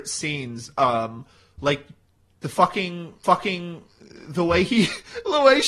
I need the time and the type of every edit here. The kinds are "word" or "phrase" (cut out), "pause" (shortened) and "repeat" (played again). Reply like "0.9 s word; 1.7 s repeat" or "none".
3.2 s repeat